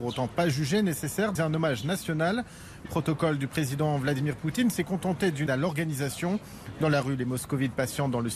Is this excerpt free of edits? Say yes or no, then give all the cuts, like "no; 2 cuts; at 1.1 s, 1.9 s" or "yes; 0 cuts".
no; 3 cuts; at 1.3 s, 2.8 s, 5.5 s